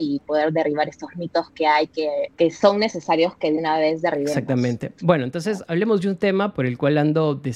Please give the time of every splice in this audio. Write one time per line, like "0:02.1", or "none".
0:02.3